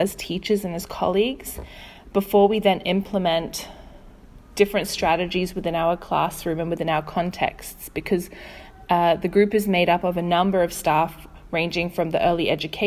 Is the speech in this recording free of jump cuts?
yes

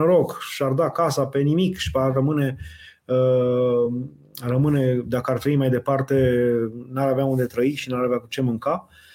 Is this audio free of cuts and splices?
yes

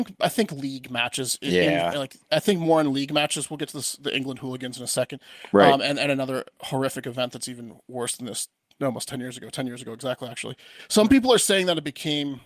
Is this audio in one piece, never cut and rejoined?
yes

